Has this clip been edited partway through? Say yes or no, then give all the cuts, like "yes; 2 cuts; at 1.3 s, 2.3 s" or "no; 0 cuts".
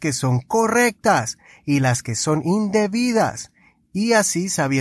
no; 0 cuts